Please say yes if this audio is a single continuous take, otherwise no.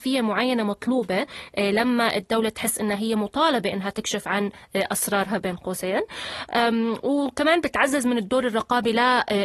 yes